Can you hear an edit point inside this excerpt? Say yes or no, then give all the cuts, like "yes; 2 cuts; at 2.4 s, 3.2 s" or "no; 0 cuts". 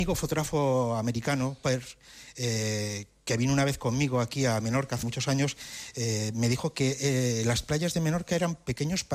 yes; 1 cut; at 5.0 s